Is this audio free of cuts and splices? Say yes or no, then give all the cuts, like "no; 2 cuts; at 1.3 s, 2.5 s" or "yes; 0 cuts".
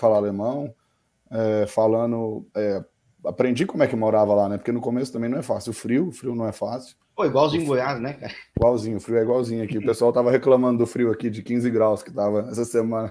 no; 2 cuts; at 2.5 s, 8.5 s